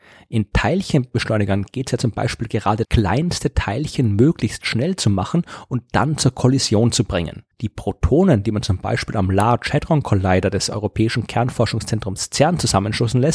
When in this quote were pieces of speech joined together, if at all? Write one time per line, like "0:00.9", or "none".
0:02.8
0:07.5